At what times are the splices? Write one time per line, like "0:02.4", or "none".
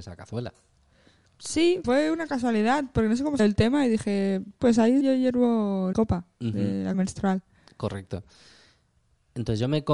0:01.8
0:03.4
0:04.6
0:05.0
0:05.9
0:06.9